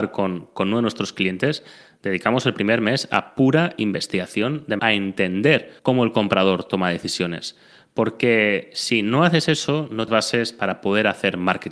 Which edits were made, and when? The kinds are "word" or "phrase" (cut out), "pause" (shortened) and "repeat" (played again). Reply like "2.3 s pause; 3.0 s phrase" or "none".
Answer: 4.8 s word; 5.8 s pause; 10.1 s phrase